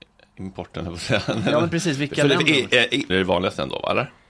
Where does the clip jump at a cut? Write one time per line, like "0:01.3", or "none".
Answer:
0:03.1